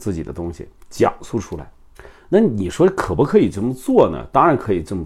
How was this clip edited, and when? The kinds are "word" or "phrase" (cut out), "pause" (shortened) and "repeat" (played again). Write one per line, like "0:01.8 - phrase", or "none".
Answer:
0:02.0 - pause